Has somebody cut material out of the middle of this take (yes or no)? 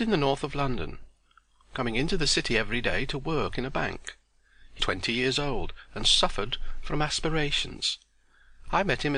yes